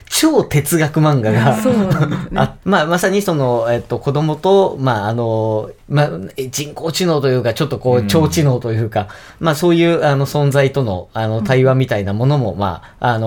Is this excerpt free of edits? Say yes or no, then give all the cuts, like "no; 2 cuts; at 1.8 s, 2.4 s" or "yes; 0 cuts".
no; 2 cuts; at 2.6 s, 5.8 s